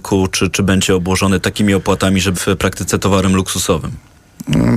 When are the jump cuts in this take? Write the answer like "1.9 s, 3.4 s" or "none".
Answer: 2.3 s